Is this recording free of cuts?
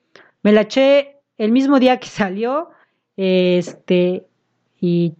yes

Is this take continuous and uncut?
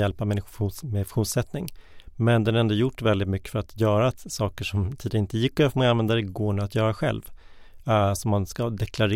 yes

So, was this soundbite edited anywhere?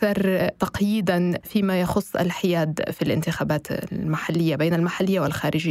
yes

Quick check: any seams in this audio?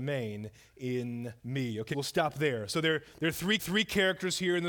yes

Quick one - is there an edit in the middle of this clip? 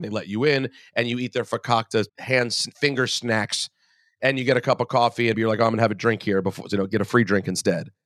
yes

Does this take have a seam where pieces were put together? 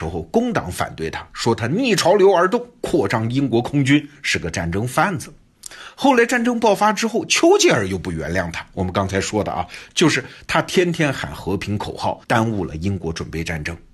yes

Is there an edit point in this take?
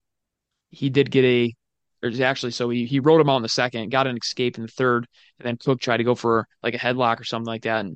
no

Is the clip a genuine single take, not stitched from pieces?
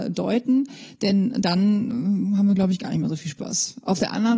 yes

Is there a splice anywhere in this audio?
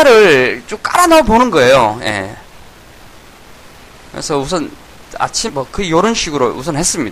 yes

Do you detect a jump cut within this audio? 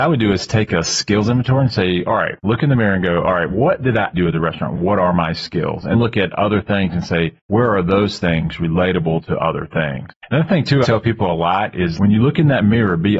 yes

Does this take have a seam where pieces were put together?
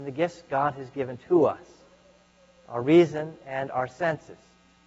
no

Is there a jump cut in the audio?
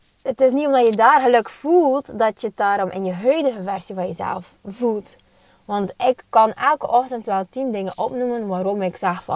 no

